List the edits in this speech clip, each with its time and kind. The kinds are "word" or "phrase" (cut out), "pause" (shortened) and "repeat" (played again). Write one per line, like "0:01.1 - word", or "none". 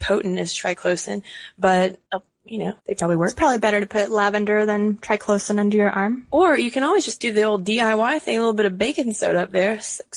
0:02.1 - pause
0:02.8 - pause